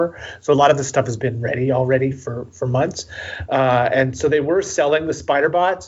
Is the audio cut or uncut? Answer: uncut